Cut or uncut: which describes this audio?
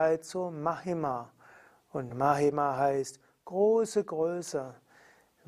uncut